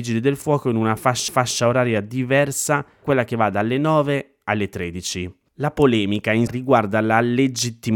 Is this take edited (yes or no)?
yes